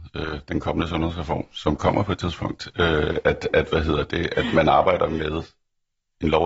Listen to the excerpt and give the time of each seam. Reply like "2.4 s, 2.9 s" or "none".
none